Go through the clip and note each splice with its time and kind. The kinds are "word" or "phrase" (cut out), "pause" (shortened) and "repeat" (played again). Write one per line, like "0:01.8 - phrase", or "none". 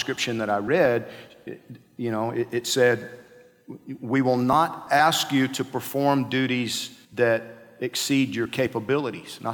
0:07.0 - pause